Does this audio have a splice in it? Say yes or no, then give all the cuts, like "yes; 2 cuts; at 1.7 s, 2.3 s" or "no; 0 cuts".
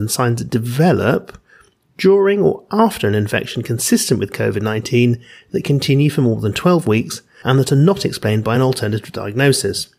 no; 0 cuts